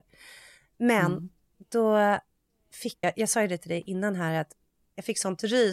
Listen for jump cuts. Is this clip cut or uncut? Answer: cut